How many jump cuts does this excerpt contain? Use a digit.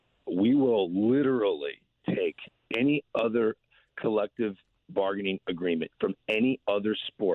0